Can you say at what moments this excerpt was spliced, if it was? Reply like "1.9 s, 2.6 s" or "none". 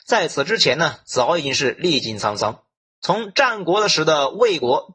none